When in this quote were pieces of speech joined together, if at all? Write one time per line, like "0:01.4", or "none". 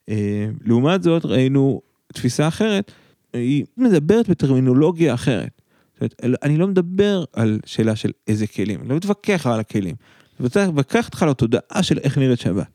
0:03.8
0:07.3
0:09.4